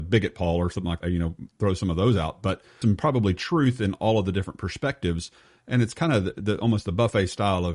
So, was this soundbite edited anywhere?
yes; 2 cuts; at 1.0 s, 2.8 s

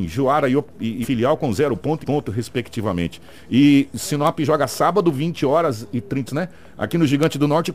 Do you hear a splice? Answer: yes; 3 cuts; at 1.0 s, 2.0 s, 6.3 s

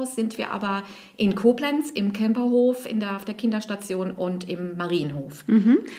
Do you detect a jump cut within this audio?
no; 0 cuts

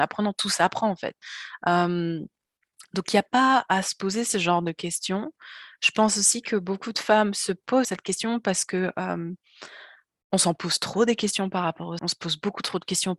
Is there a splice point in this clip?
yes; 2 cuts; at 7.8 s, 12.0 s

